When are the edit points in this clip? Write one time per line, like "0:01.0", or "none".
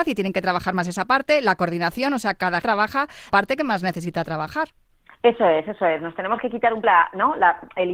0:02.6
0:03.3
0:06.8